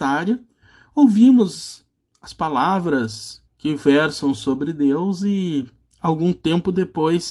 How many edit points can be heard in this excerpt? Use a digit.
1